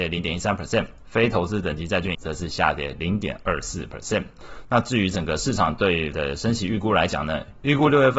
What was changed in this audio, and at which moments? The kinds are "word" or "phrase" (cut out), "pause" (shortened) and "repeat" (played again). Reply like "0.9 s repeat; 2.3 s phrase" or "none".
2.1 s word; 6.1 s word